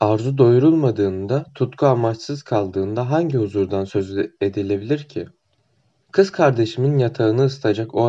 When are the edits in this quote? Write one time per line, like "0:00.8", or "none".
none